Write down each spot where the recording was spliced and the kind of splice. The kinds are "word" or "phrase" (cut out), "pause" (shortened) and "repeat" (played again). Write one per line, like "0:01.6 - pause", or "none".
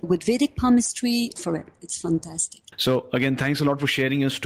0:01.4 - word
0:02.7 - pause